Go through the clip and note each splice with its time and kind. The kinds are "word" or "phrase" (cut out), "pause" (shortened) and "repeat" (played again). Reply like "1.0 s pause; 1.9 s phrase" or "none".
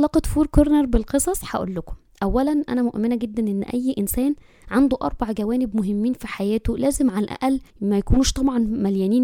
7.7 s pause